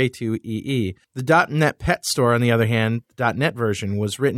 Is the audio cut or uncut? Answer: cut